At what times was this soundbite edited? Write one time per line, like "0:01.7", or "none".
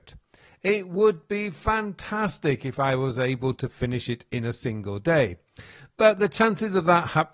none

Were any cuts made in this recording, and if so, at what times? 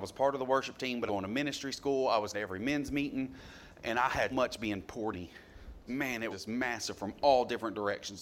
0:01.1
0:02.3
0:04.3
0:05.1
0:05.9
0:06.3

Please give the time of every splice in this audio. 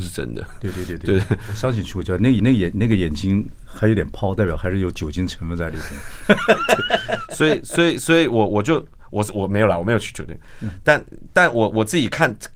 0:02.4

